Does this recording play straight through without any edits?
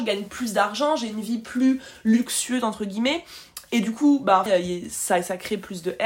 no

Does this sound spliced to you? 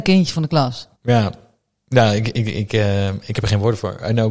yes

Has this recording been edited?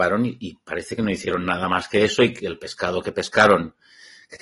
no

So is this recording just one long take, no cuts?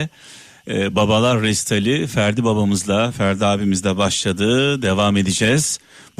yes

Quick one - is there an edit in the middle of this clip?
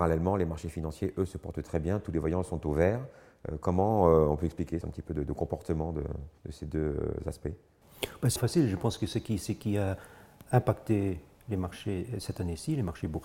yes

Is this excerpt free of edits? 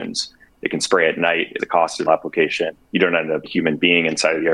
no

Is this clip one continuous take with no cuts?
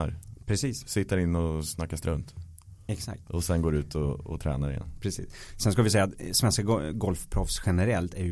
yes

